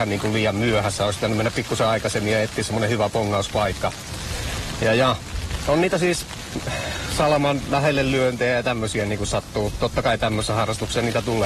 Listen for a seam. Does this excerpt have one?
no; 0 cuts

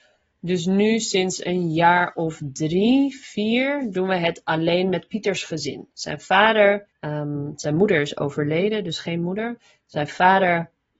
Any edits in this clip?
yes; 1 cut; at 6.9 s

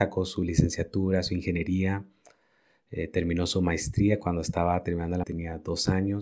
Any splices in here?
yes; 1 cut; at 5.2 s

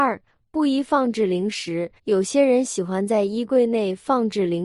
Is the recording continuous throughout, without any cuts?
no; 1 cut; at 2.0 s

